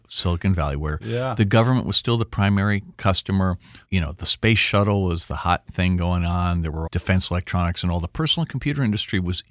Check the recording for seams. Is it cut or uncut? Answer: cut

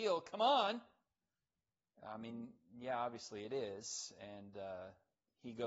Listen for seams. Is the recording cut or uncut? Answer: uncut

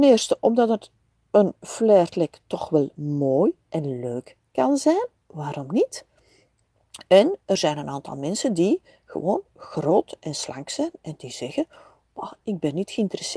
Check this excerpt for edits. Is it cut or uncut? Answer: uncut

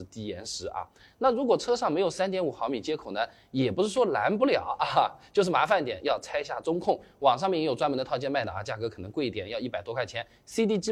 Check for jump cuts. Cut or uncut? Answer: uncut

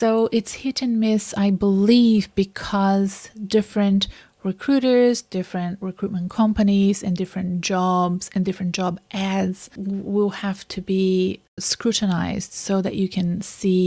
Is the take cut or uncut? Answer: uncut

